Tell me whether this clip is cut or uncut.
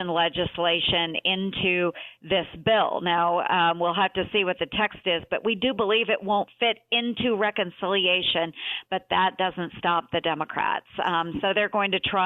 uncut